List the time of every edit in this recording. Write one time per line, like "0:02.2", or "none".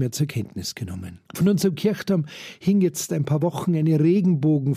0:01.2

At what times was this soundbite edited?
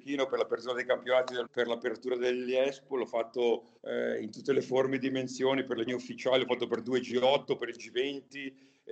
0:01.5
0:03.8
0:05.9

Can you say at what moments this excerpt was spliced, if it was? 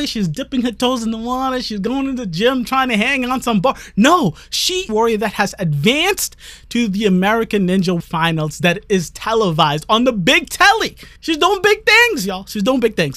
0:04.9
0:08.0
0:11.2

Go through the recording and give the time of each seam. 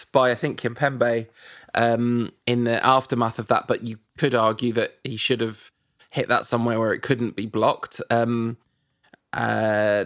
0:02.4

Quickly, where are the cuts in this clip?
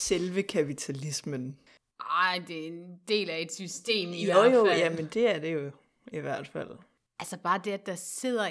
none

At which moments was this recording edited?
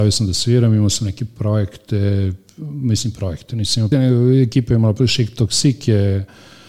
0:03.9

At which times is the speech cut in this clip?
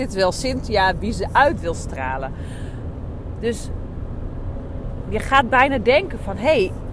none

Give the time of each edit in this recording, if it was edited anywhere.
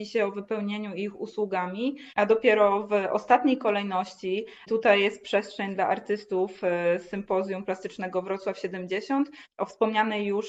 0:04.7

